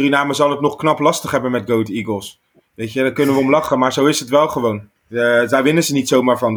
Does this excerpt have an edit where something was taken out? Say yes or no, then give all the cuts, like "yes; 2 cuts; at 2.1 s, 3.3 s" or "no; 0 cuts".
no; 0 cuts